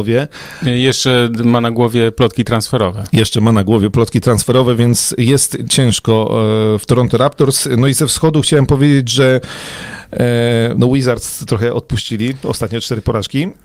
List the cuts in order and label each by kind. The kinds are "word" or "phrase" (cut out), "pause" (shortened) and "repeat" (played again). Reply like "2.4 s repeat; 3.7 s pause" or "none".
none